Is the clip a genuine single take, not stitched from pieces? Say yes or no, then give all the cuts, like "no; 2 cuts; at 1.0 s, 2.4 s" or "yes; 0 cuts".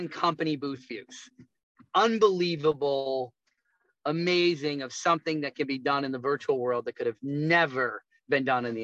yes; 0 cuts